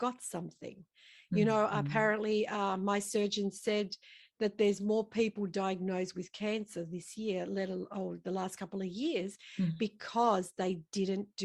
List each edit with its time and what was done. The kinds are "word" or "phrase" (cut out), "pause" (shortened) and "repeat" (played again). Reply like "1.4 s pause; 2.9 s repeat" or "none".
none